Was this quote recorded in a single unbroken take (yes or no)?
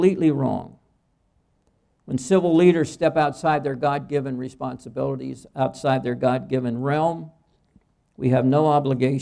yes